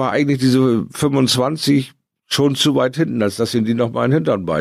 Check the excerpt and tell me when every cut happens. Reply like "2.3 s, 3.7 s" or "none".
none